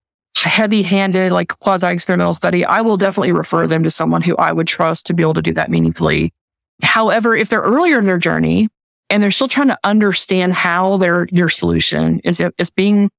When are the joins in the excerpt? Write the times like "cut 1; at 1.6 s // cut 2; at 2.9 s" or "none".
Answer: none